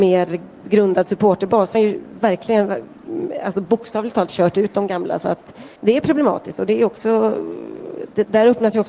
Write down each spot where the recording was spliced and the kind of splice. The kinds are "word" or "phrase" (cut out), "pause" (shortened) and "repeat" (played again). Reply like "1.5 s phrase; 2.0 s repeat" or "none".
1.7 s phrase; 5.8 s pause